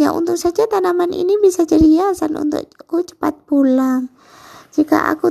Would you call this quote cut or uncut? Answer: uncut